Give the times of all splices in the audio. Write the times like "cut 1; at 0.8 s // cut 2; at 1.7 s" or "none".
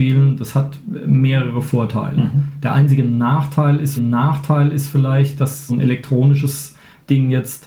cut 1; at 4.0 s // cut 2; at 5.7 s